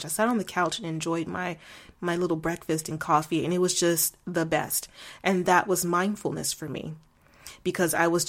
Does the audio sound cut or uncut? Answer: uncut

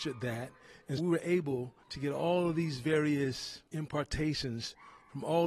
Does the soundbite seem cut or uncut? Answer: cut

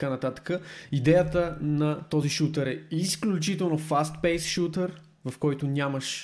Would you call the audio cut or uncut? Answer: uncut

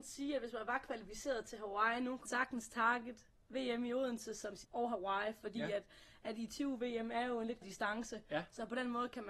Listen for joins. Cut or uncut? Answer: cut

